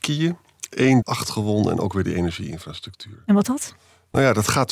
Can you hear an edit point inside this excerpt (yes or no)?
yes